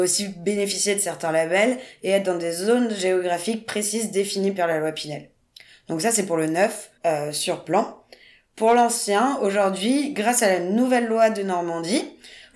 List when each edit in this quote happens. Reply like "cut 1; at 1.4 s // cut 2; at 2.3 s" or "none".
cut 1; at 7.0 s